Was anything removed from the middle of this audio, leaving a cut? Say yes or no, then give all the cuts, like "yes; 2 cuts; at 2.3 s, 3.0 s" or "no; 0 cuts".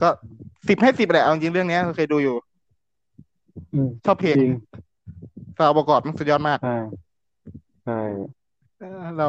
yes; 1 cut; at 7.7 s